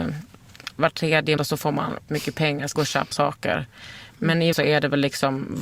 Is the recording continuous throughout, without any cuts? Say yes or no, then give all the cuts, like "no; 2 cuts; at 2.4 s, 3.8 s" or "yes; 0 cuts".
no; 5 cuts; at 1.4 s, 2.1 s, 2.8 s, 3.1 s, 4.5 s